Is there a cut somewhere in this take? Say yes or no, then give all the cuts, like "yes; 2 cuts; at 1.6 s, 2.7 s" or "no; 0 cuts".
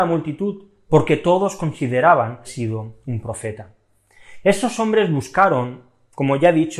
yes; 1 cut; at 2.4 s